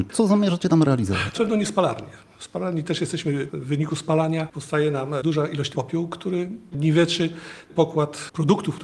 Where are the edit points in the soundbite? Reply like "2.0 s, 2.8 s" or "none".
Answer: 1.4 s, 3.5 s, 5.7 s, 6.7 s